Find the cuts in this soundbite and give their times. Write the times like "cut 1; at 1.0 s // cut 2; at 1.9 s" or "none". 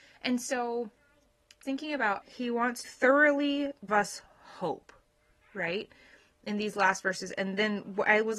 cut 1; at 1.6 s // cut 2; at 2.2 s // cut 3; at 2.8 s // cut 4; at 3.9 s